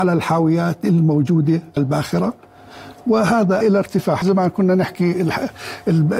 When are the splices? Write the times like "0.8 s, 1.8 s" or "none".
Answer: 1.8 s, 3.6 s, 4.2 s